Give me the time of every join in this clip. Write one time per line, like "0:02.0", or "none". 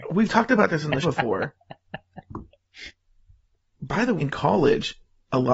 0:01.0
0:03.7
0:04.2